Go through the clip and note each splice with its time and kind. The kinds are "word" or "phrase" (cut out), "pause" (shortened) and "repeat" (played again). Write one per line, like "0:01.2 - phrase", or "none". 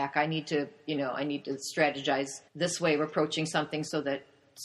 0:02.5 - pause

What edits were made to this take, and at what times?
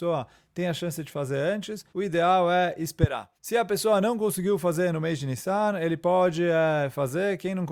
0:01.9 - pause
0:03.4 - pause

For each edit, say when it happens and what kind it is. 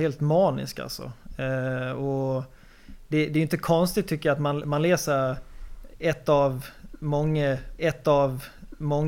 0:07.8 - repeat

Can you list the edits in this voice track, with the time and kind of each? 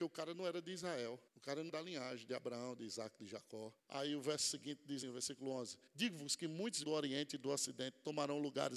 0:01.3 - pause
0:01.7 - word
0:03.8 - pause
0:05.0 - word
0:05.9 - pause
0:06.8 - word

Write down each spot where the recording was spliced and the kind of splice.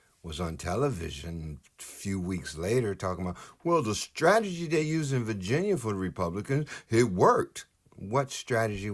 none

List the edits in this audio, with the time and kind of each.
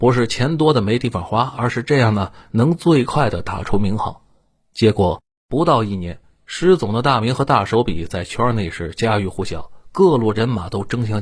none

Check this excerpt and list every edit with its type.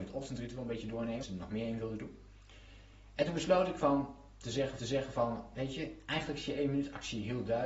0:01.2 - word
0:04.8 - repeat

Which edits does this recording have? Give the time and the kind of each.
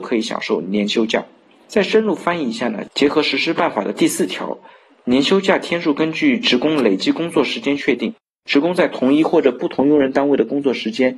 none

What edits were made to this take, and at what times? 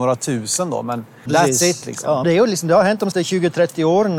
0:01.3 - word
0:02.2 - word
0:03.1 - word

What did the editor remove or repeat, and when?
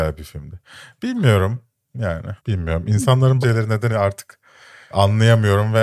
0:02.4 - pause
0:03.4 - word
0:03.9 - word
0:04.9 - word

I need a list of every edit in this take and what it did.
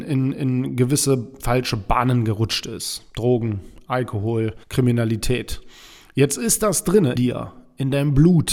0:04.6 - pause
0:07.2 - word

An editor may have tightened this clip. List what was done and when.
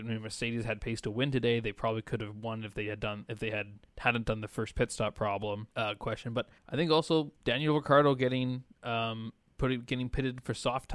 0:03.9 - pause
0:05.7 - pause
0:06.6 - pause
0:07.4 - pause

